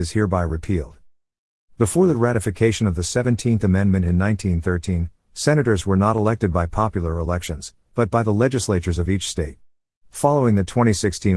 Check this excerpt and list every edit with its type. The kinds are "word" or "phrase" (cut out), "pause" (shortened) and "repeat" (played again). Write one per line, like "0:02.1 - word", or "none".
none